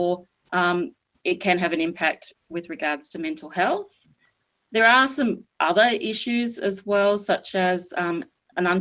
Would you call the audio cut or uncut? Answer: uncut